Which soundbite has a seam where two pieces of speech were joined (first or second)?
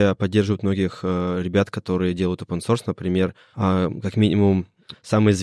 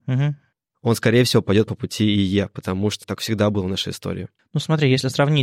second